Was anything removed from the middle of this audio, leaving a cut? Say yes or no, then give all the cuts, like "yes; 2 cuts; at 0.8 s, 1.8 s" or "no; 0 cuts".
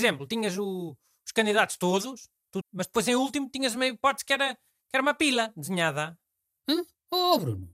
yes; 1 cut; at 2.6 s